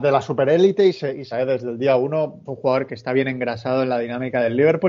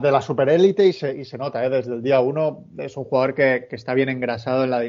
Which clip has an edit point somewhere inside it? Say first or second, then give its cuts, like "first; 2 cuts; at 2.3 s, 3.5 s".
first; 3 cuts; at 1.3 s, 2.5 s, 2.9 s